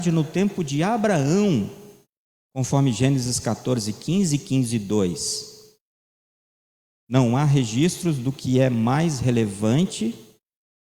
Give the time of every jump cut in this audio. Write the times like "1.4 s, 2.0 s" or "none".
none